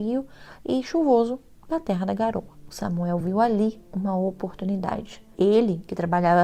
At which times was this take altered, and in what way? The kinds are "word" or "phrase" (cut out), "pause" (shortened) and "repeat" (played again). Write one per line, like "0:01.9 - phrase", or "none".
none